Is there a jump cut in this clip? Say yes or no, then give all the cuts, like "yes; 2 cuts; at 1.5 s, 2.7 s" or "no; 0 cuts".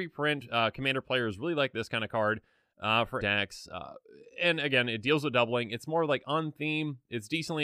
yes; 1 cut; at 3.2 s